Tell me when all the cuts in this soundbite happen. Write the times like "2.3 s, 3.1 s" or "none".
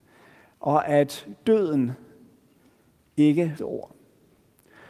3.6 s